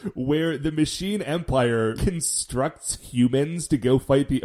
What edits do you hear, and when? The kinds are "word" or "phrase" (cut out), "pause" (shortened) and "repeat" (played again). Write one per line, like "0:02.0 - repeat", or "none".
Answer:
0:02.0 - word